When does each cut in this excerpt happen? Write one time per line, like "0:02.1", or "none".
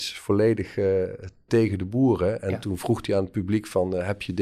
0:01.5